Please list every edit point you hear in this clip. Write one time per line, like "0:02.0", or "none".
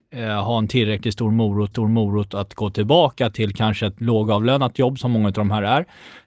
0:01.7